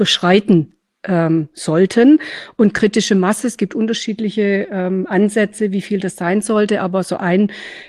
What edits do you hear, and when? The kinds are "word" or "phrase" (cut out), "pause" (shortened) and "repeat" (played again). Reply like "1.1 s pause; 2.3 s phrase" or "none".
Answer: none